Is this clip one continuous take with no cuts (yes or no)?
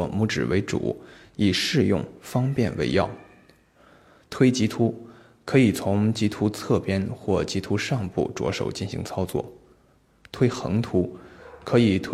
yes